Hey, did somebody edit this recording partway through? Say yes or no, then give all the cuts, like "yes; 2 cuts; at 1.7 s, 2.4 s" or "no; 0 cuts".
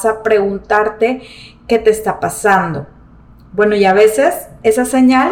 no; 0 cuts